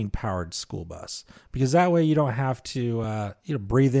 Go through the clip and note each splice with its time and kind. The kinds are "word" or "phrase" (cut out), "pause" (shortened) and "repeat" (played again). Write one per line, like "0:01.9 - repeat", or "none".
none